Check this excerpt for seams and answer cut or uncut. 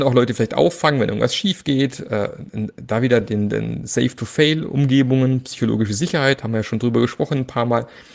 uncut